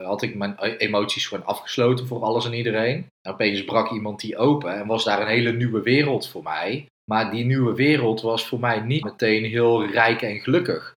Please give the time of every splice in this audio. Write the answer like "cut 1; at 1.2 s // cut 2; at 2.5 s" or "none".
cut 1; at 3.1 s // cut 2; at 6.9 s // cut 3; at 9.0 s